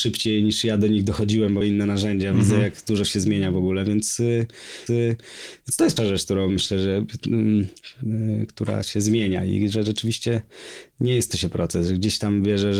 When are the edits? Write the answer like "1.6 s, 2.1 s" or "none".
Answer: 1.6 s, 4.9 s, 6.0 s, 11.3 s